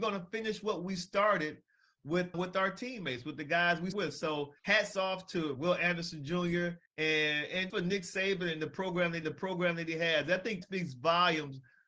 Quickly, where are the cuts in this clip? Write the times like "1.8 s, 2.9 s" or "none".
2.3 s, 3.9 s, 4.6 s, 5.5 s, 6.9 s, 7.7 s, 9.2 s, 10.6 s